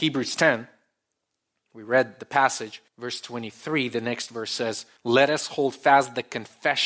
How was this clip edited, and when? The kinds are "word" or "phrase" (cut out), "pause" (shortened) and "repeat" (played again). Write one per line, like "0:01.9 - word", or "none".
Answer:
0:02.9 - pause
0:05.0 - pause